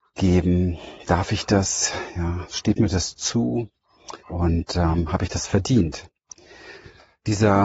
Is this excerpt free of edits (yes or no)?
no